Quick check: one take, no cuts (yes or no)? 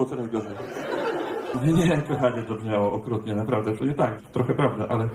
no